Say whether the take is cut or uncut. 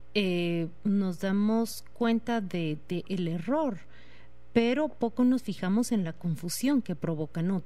uncut